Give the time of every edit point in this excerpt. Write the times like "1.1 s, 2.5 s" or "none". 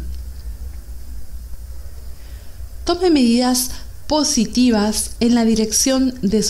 none